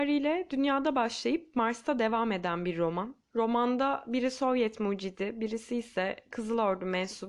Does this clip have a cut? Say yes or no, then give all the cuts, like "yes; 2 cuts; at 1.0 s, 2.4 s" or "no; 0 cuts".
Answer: yes; 1 cut; at 3.2 s